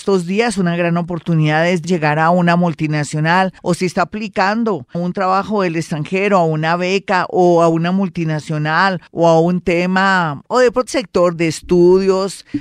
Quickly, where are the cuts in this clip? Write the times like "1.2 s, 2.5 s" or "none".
1.8 s, 3.6 s, 4.9 s, 9.1 s, 10.9 s, 11.4 s